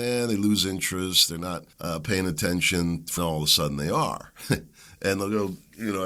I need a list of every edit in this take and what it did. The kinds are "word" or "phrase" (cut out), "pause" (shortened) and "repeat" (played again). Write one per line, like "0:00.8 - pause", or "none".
0:01.7 - pause
0:03.2 - phrase

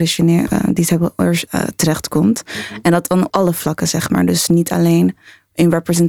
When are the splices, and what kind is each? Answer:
0:01.5 - word
0:03.3 - word

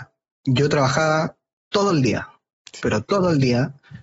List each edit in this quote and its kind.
none

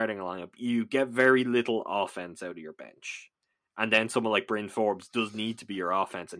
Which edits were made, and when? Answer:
none

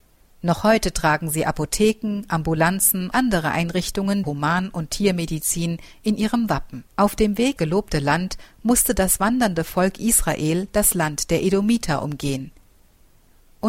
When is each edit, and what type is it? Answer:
0:03.1 - word
0:04.2 - word
0:06.9 - pause
0:07.6 - phrase

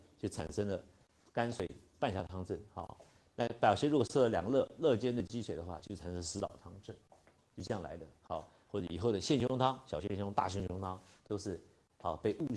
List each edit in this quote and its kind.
none

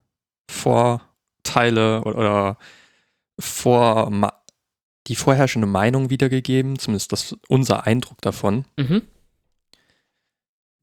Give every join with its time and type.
0:02.1 - word

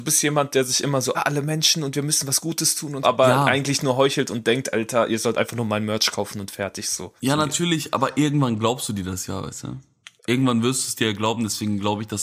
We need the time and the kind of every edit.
0:01.1 - phrase
0:03.0 - word
0:07.2 - pause
0:10.2 - pause

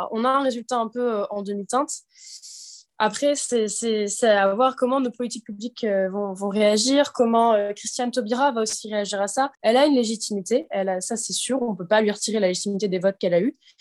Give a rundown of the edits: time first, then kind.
0:09.5 - pause

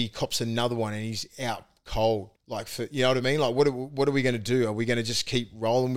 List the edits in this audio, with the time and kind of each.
0:02.4 - pause

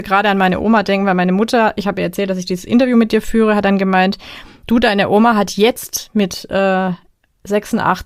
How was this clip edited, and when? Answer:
none

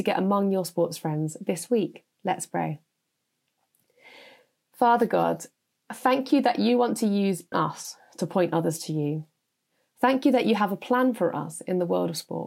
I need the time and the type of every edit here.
0:02.1 - pause
0:07.5 - word

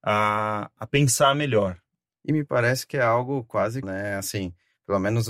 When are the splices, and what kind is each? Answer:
0:03.8 - phrase

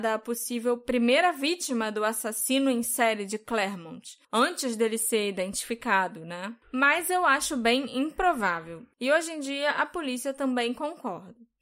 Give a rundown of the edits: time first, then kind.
0:04.2 - pause
0:06.6 - pause

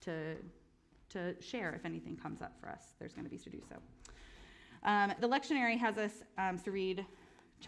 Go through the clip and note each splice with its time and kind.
0:03.4 - word
0:05.2 - word
0:06.6 - word

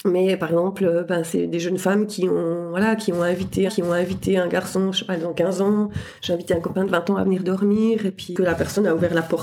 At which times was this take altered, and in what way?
0:03.7 - repeat

